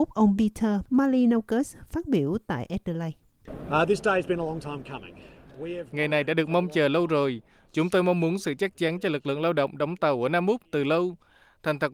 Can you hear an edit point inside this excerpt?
no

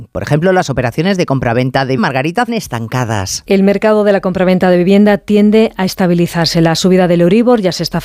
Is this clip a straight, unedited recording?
no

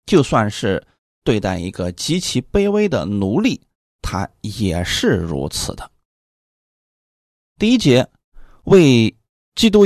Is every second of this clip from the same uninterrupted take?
yes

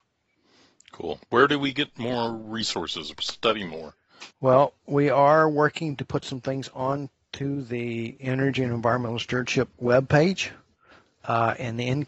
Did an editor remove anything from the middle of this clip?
yes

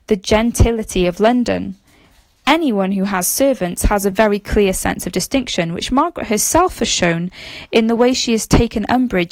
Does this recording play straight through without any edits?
yes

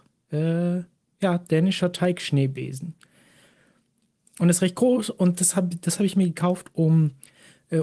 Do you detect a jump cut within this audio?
no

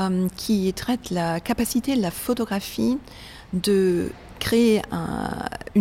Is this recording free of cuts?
yes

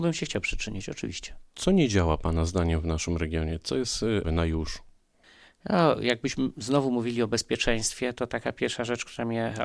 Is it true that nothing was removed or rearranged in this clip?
no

